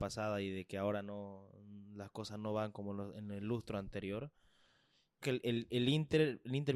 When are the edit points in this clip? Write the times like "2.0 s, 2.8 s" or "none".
5.2 s